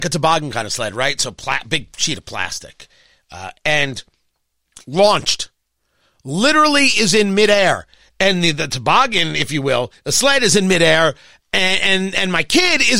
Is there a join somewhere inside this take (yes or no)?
no